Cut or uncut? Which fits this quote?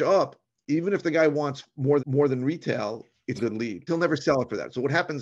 cut